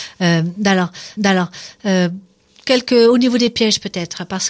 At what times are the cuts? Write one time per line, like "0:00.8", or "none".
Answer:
0:01.2